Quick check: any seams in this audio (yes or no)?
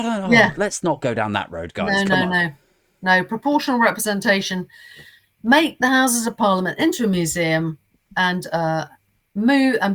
no